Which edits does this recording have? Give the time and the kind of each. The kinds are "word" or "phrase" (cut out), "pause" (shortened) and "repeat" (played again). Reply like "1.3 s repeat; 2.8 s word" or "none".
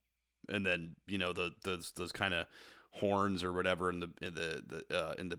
none